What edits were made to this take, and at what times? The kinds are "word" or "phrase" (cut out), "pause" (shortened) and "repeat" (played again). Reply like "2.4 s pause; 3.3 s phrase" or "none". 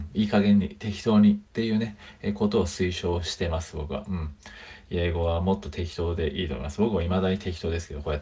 1.5 s pause